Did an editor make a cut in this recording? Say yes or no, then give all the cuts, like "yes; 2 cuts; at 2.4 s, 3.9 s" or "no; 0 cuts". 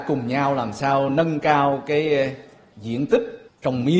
no; 0 cuts